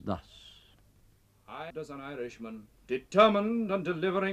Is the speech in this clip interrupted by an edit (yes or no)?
yes